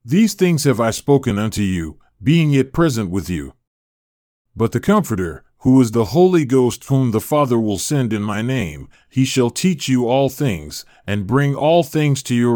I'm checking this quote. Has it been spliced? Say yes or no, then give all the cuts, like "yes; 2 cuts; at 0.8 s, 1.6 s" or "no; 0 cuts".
no; 0 cuts